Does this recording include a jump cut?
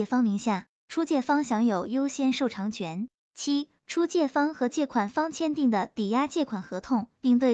yes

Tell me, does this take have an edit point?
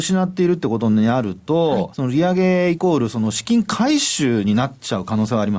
yes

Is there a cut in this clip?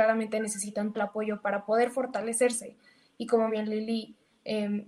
yes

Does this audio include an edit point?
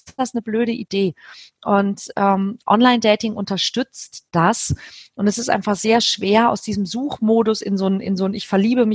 no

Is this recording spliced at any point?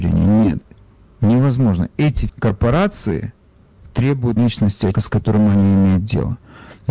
yes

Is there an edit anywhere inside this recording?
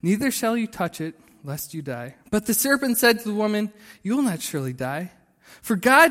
yes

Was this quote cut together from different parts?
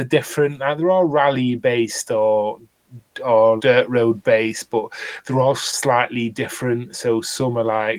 yes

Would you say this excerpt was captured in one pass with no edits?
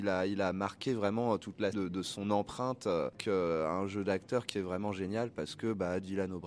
no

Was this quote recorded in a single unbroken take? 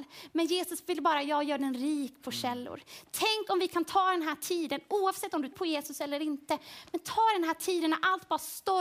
no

